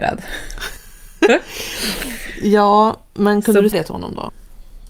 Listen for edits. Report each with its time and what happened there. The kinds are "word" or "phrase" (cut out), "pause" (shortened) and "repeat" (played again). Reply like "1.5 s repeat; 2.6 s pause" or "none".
3.7 s word